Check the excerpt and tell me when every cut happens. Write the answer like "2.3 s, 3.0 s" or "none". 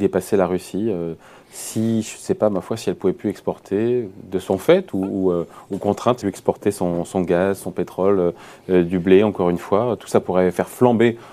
6.2 s